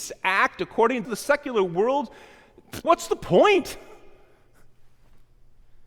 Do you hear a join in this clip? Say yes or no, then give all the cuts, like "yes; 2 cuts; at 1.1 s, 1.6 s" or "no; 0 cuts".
yes; 2 cuts; at 1.0 s, 2.8 s